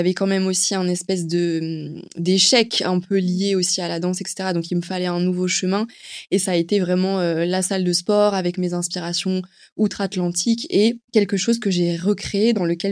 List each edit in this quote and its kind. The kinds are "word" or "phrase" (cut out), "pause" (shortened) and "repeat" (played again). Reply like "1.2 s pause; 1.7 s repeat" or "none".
11.1 s pause

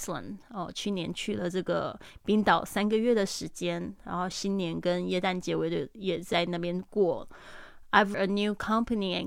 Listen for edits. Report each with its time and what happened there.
8.1 s word

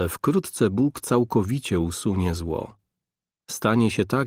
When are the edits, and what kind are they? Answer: none

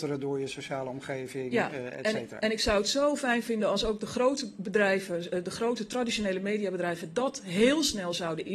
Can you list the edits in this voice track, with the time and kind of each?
none

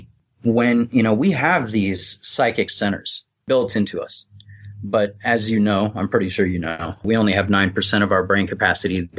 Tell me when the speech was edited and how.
none

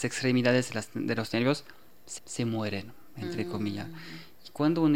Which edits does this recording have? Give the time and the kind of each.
2.2 s repeat

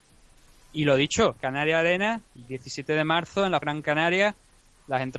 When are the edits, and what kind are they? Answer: 1.4 s word; 2.3 s pause; 3.6 s phrase

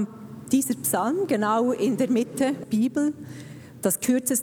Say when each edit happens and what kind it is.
2.6 s word

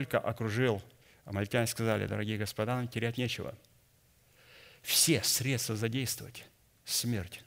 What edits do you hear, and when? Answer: none

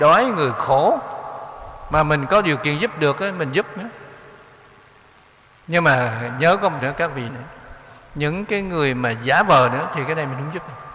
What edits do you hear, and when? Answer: 6.8 s word; 7.3 s word

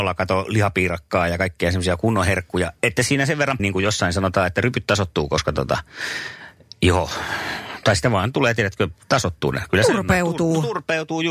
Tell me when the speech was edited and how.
3.0 s word; 3.6 s word

